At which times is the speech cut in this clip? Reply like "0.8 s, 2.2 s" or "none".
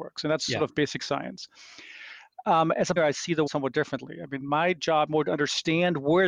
3.0 s, 3.5 s, 5.1 s